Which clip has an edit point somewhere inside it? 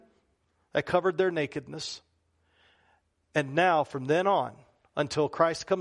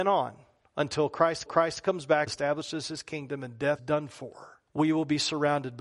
second; 4 cuts; at 1.5 s, 2.3 s, 3.8 s, 4.7 s

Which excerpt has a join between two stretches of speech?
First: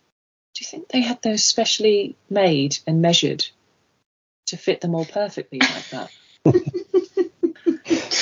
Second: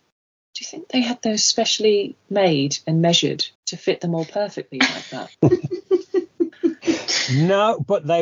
second; 2 cuts; at 3.6 s, 5.3 s

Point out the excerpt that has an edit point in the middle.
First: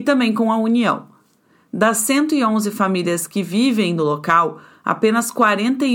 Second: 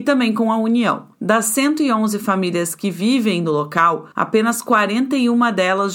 second; 2 cuts; at 1.1 s, 4.1 s

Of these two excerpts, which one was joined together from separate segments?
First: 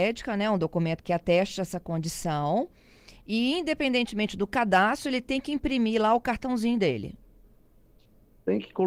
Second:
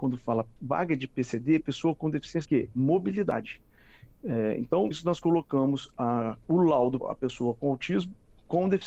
second; 3 cuts; at 2.4 s, 4.9 s, 7.0 s

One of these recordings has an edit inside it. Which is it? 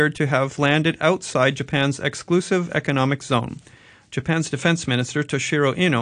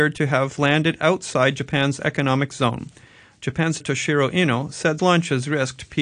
second; 3 cuts; at 2.0 s, 3.8 s, 5.0 s

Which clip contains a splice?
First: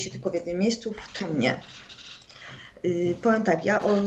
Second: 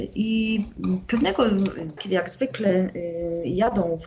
second; 1 cut; at 2.0 s

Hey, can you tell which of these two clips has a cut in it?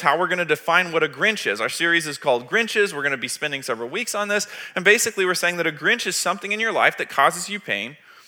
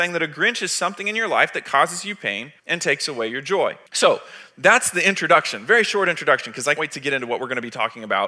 second; 3 cuts; at 2.6 s, 3.9 s, 6.8 s

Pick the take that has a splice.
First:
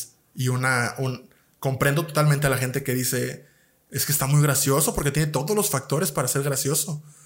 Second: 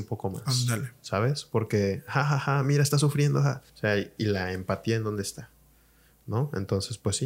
second; 1 cut; at 3.7 s

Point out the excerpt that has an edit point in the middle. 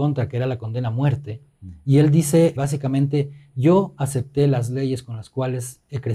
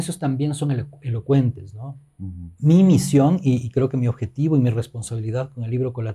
first; 1 cut; at 2.6 s

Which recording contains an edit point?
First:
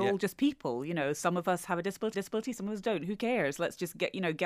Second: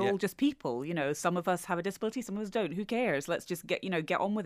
first; 1 cut; at 2.1 s

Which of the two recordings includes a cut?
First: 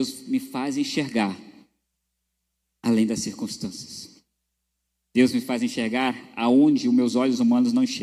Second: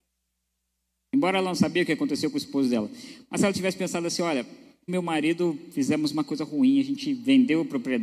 second; 1 cut; at 4.9 s

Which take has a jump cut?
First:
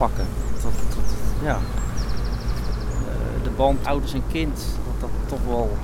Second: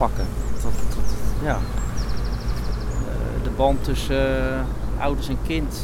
first; 1 cut; at 3.8 s

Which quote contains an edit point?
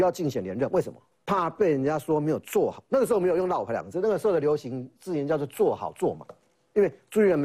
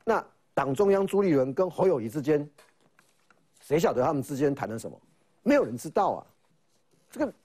first; 1 cut; at 1.1 s

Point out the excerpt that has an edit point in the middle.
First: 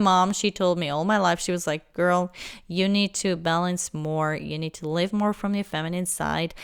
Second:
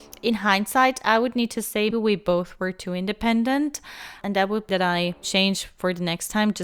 second; 4 cuts; at 1.9 s, 4.2 s, 4.7 s, 5.2 s

